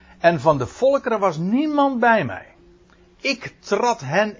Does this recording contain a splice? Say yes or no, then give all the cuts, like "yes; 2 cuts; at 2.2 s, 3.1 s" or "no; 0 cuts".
no; 0 cuts